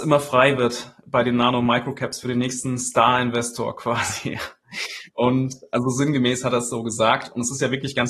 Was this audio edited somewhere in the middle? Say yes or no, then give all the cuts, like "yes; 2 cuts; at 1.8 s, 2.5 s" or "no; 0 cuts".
no; 0 cuts